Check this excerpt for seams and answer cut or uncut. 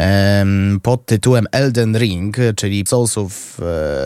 cut